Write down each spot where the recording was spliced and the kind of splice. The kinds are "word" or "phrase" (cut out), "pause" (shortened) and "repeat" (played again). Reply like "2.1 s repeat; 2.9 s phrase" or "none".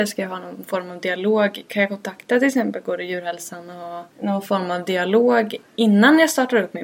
4.1 s pause